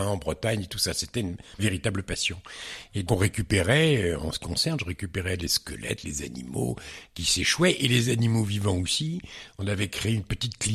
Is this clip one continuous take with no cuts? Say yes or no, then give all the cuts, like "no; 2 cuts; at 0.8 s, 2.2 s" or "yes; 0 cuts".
no; 3 cuts; at 1.6 s, 3.1 s, 4.4 s